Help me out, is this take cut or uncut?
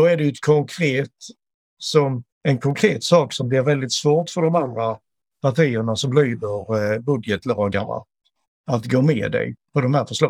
cut